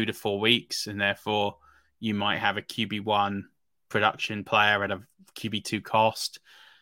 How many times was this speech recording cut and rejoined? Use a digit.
0